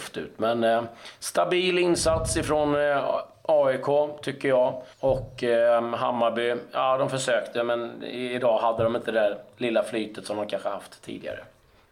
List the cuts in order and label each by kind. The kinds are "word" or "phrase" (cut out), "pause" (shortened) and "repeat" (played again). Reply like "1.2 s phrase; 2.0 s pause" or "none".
4.9 s pause